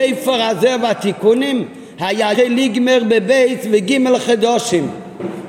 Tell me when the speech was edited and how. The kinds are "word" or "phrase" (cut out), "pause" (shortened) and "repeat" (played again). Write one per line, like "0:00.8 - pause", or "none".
0:02.3 - word